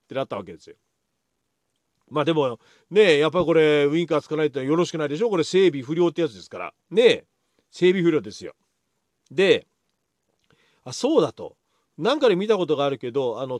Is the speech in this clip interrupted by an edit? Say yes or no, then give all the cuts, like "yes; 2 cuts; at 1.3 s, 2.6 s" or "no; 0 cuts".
yes; 1 cut; at 6.8 s